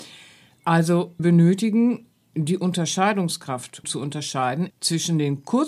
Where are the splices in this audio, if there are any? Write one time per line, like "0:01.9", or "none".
0:01.2
0:03.8
0:04.7